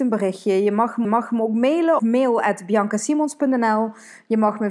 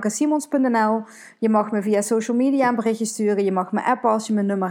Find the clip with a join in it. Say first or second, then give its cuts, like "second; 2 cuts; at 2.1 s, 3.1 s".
first; 2 cuts; at 1.0 s, 2.0 s